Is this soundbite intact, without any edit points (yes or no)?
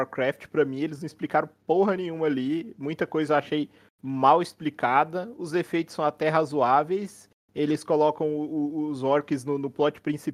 yes